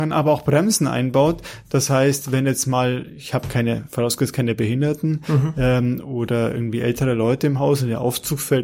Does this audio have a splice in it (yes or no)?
no